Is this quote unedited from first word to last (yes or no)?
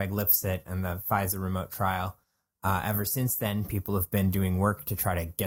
yes